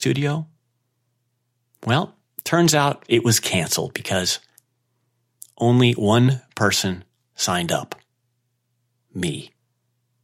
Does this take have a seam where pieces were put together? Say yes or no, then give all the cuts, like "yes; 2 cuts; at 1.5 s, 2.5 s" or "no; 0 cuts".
no; 0 cuts